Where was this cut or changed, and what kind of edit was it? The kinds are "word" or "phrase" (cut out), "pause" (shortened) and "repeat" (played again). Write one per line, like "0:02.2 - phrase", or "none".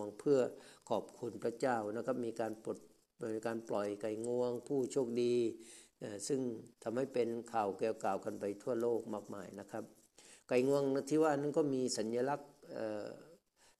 0:06.7 - pause